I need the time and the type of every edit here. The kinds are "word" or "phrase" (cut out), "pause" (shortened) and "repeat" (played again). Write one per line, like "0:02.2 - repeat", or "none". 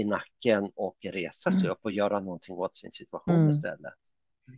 none